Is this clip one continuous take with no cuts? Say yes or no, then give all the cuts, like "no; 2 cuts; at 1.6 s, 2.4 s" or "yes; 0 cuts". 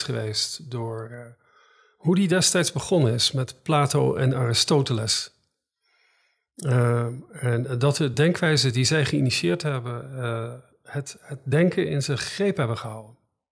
yes; 0 cuts